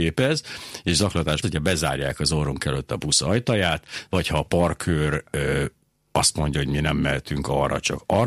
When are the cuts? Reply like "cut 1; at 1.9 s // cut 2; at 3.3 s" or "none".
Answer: cut 1; at 1.4 s